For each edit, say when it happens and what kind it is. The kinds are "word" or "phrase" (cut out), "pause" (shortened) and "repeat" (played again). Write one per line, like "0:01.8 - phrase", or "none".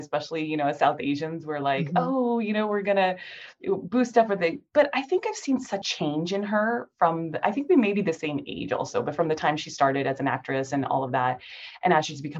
0:05.8 - word